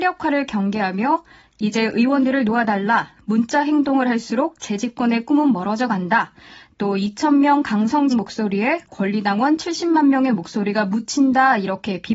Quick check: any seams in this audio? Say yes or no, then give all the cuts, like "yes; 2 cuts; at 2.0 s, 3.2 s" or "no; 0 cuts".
yes; 1 cut; at 8.1 s